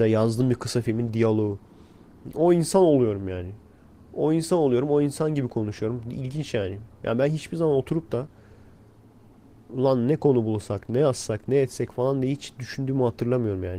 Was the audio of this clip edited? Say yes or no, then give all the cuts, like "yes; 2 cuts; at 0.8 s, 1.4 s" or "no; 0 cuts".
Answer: no; 0 cuts